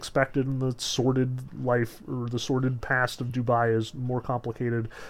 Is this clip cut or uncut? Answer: uncut